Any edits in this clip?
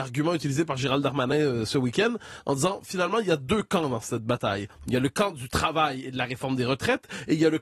no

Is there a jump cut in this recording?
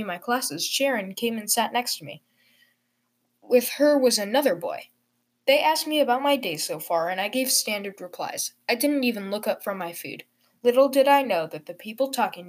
no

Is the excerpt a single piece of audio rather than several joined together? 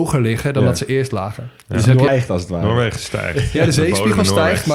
no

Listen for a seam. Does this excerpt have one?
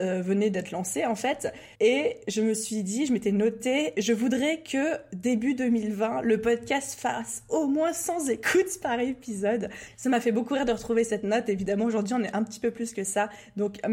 yes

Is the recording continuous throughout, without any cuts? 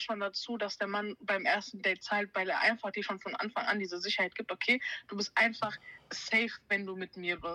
yes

